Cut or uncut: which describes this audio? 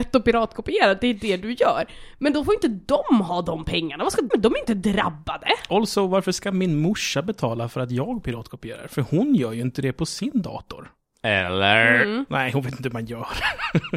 cut